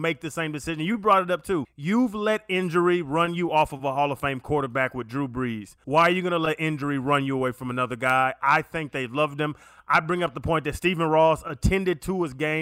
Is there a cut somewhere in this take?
no; 0 cuts

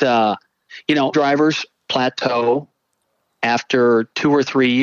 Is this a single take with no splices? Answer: no; 1 cut; at 1.1 s

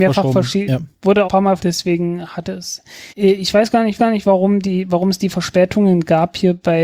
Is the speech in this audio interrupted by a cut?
yes; 4 cuts; at 1.2 s, 1.6 s, 3.1 s, 4.0 s

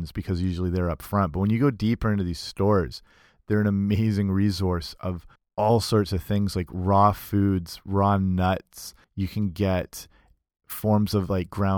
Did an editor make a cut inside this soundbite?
yes; 2 cuts; at 5.3 s, 9.0 s

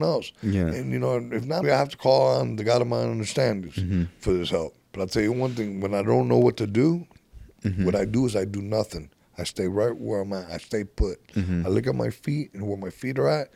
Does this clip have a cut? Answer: yes; 2 cuts; at 1.6 s, 4.8 s

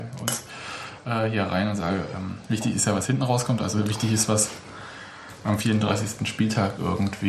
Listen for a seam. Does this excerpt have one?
no; 0 cuts

